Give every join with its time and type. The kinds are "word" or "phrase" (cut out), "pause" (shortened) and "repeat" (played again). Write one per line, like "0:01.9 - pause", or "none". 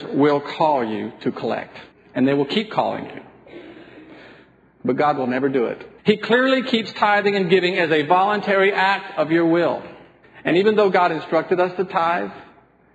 0:01.9 - pause
0:06.0 - pause
0:10.2 - pause